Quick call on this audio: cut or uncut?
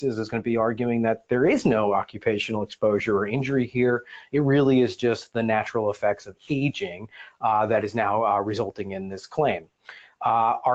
uncut